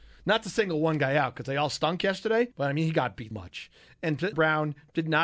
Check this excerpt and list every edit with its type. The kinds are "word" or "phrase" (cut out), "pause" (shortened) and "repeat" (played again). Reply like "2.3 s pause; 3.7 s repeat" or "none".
2.5 s pause; 3.3 s word; 4.3 s word